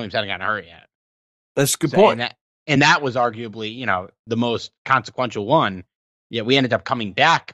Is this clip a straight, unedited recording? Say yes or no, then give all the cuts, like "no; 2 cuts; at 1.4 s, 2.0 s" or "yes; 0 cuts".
yes; 0 cuts